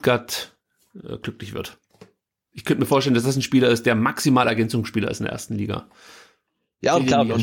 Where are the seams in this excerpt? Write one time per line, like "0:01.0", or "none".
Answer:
none